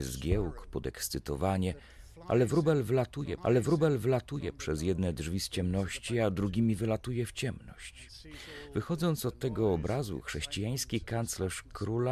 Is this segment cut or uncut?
cut